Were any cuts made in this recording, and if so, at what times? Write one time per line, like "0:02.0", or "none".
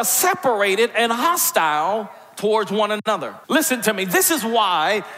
0:03.4